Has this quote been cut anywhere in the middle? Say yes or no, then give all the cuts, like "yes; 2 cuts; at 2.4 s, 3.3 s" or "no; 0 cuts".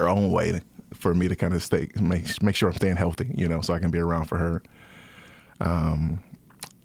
no; 0 cuts